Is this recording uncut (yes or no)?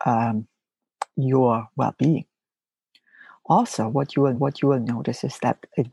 no